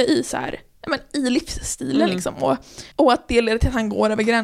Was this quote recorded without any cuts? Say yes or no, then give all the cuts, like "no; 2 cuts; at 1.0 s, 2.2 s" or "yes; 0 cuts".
no; 1 cut; at 2.9 s